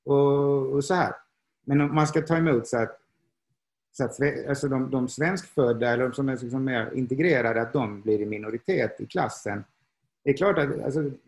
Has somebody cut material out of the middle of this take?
no; 0 cuts

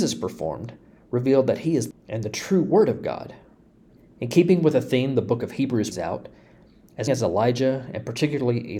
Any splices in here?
yes; 4 cuts; at 1.9 s, 3.9 s, 5.9 s, 7.1 s

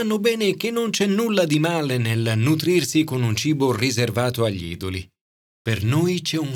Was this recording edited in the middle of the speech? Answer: no; 0 cuts

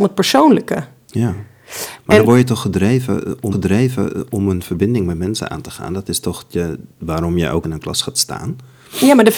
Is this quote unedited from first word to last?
no; 2 cuts; at 3.5 s, 7.6 s

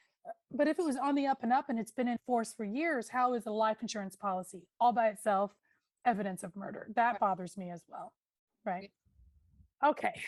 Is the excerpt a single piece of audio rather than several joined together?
yes; 0 cuts

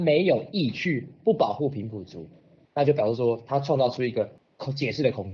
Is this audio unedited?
yes; 0 cuts

